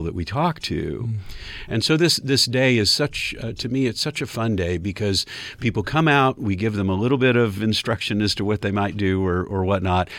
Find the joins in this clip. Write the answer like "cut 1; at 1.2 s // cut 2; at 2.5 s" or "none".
none